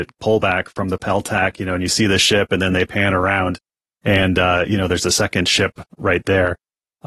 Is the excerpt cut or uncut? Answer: uncut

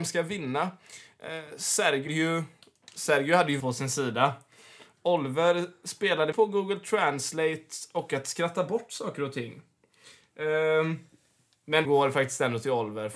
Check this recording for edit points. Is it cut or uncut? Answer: cut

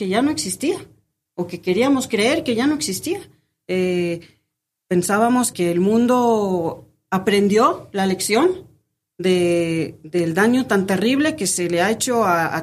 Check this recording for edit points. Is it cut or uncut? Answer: cut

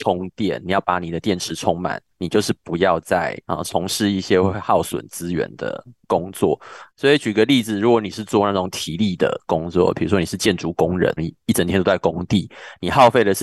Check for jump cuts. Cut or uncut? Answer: cut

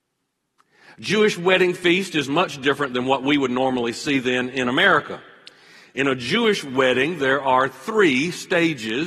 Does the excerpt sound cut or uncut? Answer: uncut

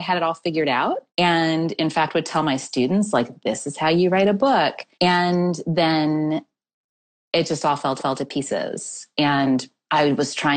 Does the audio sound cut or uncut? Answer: cut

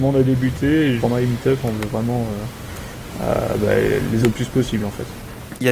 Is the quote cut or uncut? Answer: cut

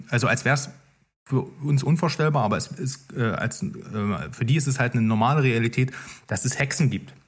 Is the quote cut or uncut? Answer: uncut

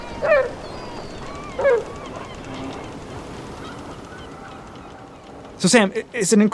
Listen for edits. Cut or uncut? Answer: uncut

